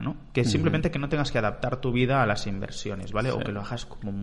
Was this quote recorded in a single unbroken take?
yes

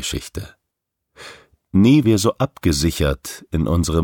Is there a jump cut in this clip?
yes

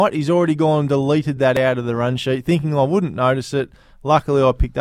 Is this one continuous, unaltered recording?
yes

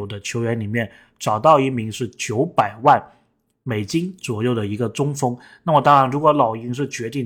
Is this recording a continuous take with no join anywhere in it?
yes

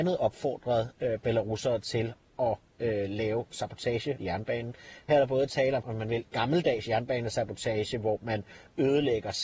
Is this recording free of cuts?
no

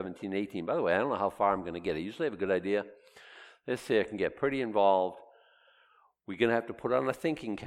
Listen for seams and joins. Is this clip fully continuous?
yes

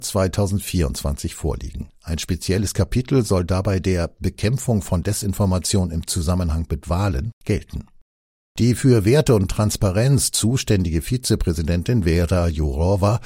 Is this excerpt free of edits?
yes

